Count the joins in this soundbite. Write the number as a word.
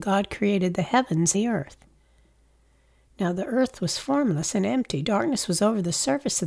one